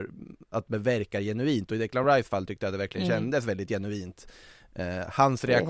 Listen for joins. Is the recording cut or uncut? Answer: uncut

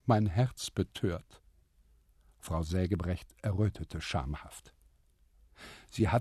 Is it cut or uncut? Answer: uncut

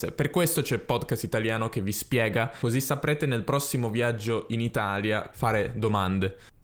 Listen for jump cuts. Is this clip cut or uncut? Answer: cut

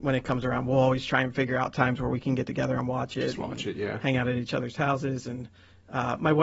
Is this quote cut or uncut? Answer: uncut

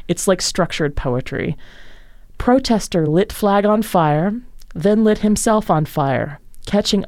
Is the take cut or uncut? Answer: uncut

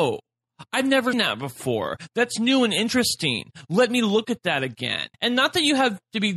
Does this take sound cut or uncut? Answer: cut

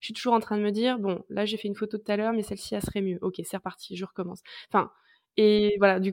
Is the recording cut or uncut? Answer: uncut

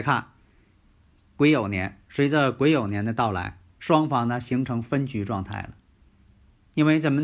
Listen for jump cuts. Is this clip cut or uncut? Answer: cut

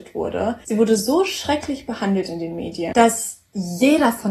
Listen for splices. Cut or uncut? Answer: uncut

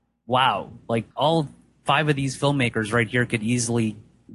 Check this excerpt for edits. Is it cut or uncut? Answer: cut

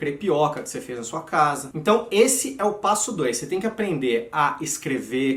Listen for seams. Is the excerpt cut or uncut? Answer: uncut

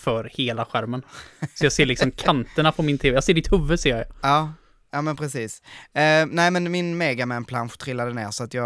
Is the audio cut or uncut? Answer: uncut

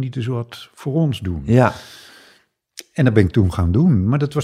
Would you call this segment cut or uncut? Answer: uncut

